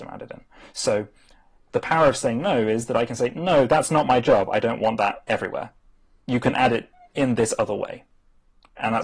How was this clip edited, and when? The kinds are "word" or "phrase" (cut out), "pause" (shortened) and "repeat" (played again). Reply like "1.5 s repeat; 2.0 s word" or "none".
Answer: none